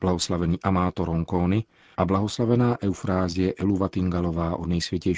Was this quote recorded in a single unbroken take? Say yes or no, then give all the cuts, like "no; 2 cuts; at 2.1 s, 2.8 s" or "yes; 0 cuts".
yes; 0 cuts